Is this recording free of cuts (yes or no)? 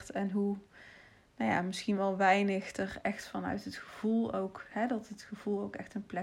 yes